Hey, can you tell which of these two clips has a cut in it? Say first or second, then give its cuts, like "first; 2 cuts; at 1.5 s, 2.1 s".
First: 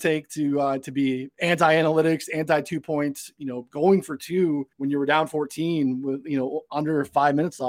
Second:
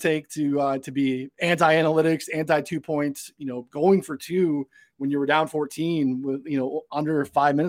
first; 1 cut; at 4.7 s